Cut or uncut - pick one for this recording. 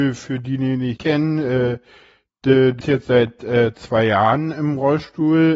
cut